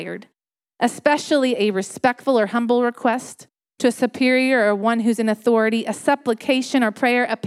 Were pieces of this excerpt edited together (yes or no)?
no